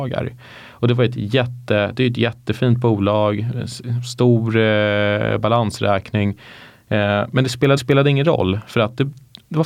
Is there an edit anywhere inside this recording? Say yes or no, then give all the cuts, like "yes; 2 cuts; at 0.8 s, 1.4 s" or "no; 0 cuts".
yes; 1 cut; at 7.8 s